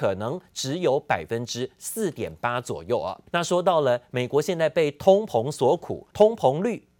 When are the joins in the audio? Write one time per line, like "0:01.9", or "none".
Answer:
0:03.3
0:06.1